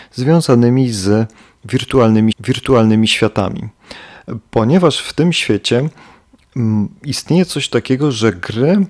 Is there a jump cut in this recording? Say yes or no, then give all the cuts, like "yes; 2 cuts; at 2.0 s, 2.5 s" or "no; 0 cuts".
yes; 1 cut; at 2.3 s